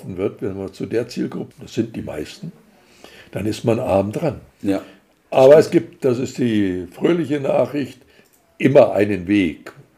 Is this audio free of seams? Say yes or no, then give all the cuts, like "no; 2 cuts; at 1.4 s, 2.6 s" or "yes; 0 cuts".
no; 2 cuts; at 1.5 s, 4.5 s